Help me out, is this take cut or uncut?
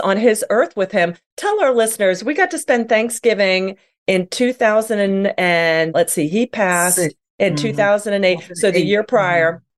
uncut